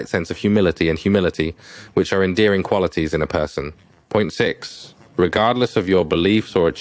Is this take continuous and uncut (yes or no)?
yes